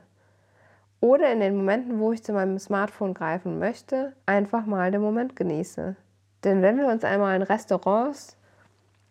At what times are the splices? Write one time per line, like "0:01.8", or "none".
0:04.2
0:06.2